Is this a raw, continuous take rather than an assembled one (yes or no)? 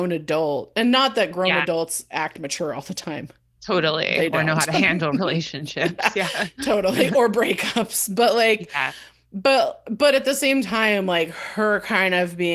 yes